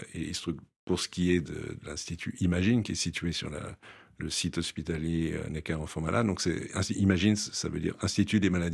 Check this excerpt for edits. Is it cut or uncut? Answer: uncut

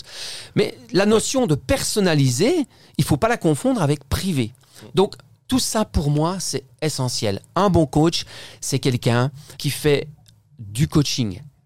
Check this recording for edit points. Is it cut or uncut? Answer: cut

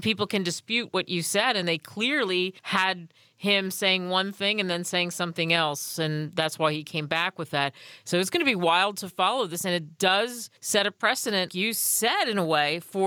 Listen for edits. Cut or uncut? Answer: cut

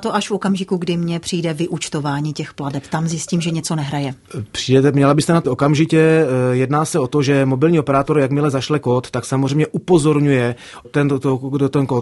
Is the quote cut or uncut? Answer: cut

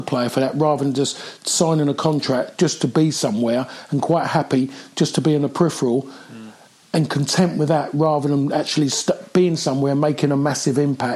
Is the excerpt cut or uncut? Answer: uncut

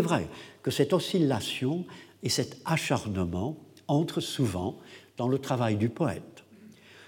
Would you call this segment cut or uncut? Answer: uncut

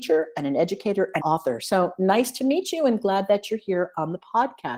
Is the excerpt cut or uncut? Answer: cut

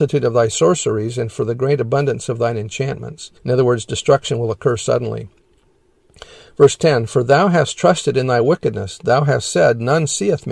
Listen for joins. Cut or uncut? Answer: cut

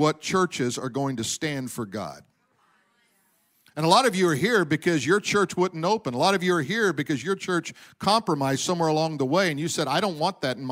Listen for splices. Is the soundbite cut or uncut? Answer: uncut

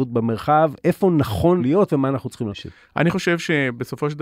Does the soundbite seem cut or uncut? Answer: cut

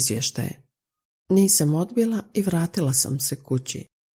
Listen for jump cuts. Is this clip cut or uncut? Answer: uncut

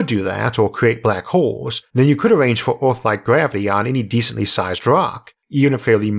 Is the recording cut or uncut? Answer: uncut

